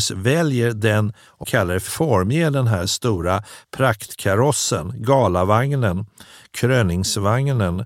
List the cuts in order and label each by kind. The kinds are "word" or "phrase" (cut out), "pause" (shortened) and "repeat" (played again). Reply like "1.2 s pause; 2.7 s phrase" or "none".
1.4 s phrase; 1.9 s phrase